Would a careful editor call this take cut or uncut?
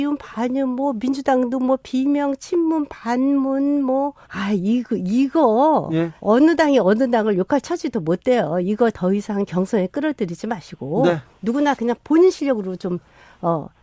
cut